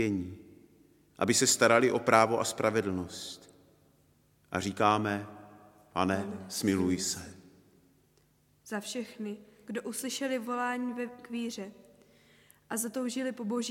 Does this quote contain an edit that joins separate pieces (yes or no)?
no